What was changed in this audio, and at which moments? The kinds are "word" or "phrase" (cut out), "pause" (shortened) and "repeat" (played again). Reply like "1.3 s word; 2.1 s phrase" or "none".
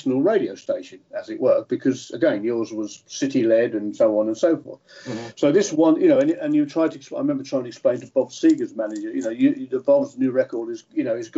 none

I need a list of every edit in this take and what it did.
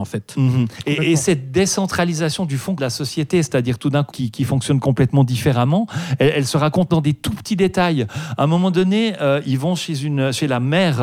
2.8 s word; 4.1 s phrase; 6.9 s word

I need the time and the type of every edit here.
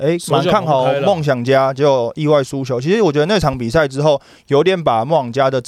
none

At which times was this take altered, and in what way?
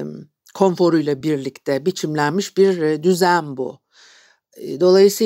none

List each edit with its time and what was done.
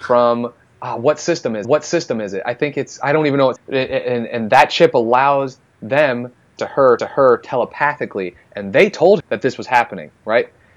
1.6 s repeat; 3.6 s word; 6.6 s phrase; 7.0 s repeat; 9.2 s word

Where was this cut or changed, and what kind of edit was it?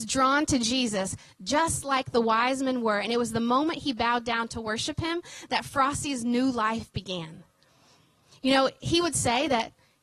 none

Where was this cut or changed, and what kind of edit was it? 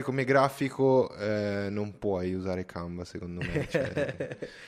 none

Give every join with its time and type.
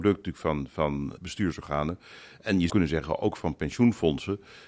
1.2 s word; 2.7 s word

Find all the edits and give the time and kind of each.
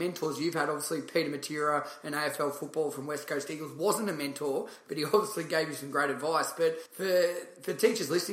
6.9 s pause

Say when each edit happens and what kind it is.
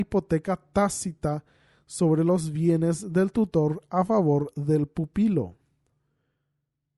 none

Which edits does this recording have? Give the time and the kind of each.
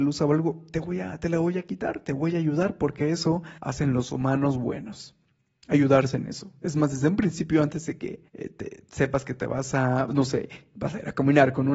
3.6 s pause; 8.3 s pause

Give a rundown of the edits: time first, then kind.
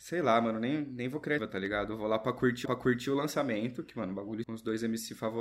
1.4 s word; 2.6 s repeat; 4.4 s phrase

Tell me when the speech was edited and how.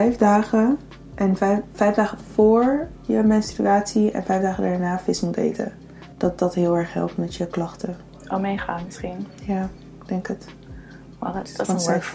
6.1 s pause

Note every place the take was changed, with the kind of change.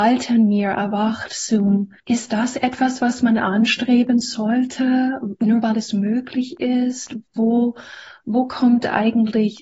2.0 s pause

